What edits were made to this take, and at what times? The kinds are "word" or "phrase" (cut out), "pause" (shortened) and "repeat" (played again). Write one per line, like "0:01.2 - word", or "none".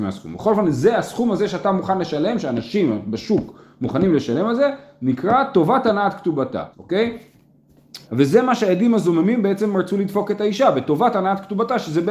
0:06.7 - pause
0:08.0 - pause